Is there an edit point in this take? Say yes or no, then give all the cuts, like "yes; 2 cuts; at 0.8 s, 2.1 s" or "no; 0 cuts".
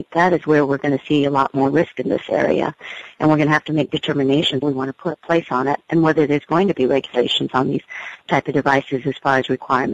yes; 1 cut; at 4.6 s